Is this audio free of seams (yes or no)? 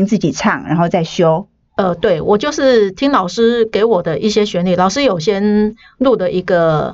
yes